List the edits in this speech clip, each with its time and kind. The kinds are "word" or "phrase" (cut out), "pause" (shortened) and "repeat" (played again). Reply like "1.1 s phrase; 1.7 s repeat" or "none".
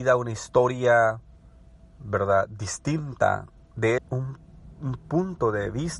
4.0 s phrase